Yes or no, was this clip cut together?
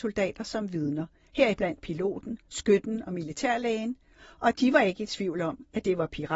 no